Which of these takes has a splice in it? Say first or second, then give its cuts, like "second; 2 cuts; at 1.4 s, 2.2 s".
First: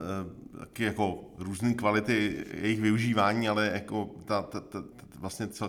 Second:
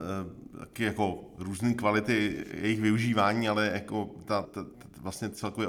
second; 1 cut; at 4.4 s